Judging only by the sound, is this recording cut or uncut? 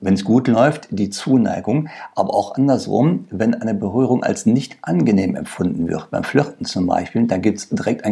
uncut